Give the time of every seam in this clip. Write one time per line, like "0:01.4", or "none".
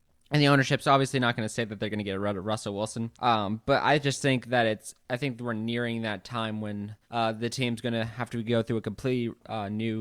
0:03.1
0:07.0